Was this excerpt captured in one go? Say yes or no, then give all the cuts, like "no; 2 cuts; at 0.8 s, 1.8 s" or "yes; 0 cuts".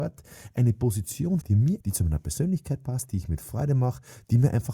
no; 2 cuts; at 1.4 s, 1.8 s